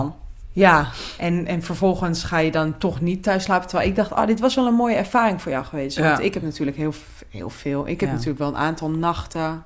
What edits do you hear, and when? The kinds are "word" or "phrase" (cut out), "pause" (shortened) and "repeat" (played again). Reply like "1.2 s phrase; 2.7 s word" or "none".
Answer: none